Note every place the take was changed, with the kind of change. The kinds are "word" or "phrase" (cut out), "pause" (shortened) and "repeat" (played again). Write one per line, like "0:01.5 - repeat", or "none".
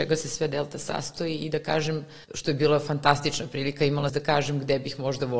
0:02.2 - pause
0:04.1 - phrase